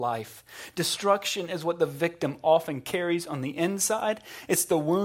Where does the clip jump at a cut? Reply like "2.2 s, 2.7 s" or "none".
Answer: none